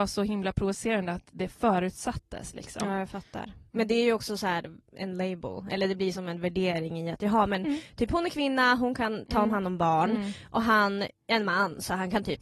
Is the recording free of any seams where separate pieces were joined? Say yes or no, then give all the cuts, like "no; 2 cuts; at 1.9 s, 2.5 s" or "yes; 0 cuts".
yes; 0 cuts